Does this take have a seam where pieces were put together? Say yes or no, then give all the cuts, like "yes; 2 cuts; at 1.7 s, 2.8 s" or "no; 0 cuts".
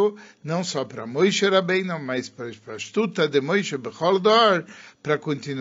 no; 0 cuts